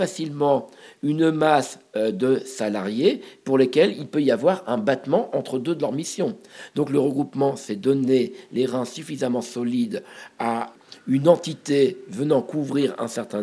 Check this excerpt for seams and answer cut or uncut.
uncut